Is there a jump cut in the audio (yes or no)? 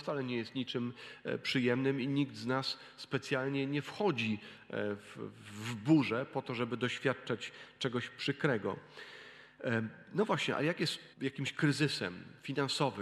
yes